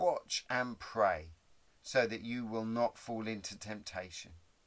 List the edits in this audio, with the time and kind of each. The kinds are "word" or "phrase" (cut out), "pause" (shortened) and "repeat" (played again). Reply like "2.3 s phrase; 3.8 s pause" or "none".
none